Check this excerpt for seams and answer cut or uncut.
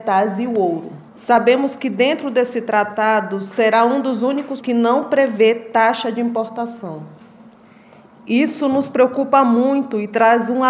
cut